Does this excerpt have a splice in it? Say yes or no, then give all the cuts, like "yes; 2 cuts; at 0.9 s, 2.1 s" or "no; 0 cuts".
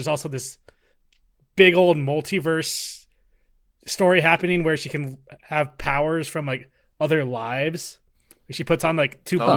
no; 0 cuts